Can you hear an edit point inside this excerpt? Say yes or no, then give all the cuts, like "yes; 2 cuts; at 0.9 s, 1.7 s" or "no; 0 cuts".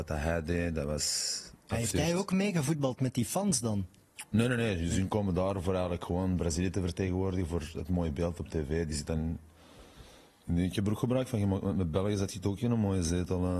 no; 0 cuts